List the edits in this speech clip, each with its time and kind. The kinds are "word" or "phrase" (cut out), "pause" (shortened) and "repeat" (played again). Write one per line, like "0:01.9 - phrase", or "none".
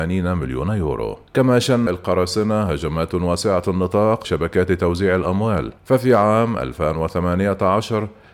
0:01.3 - pause
0:01.9 - word
0:04.2 - word
0:05.8 - pause